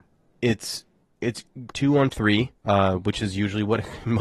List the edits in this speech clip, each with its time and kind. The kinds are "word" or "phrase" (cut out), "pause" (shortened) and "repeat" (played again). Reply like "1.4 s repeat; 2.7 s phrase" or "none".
1.7 s word; 2.1 s phrase; 2.6 s pause